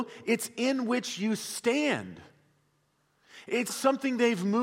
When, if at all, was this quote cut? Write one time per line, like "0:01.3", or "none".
0:03.7